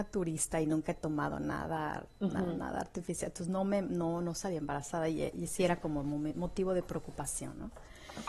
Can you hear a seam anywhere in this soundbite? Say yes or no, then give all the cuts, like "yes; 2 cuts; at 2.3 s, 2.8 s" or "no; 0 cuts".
no; 0 cuts